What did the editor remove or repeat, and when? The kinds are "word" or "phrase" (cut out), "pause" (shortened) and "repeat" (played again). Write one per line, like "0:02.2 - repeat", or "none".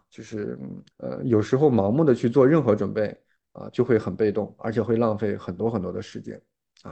0:00.9 - pause